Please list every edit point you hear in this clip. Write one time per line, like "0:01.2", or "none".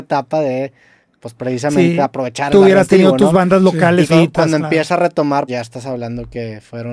0:04.1
0:05.5

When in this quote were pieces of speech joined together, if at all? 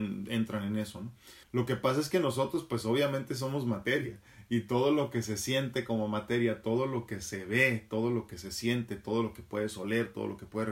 0:01.4

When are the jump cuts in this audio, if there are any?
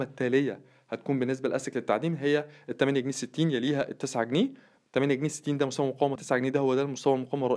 0:06.2

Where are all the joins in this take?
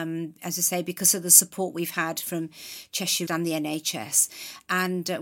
0:03.3

